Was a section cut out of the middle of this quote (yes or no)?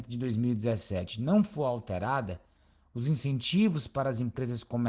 no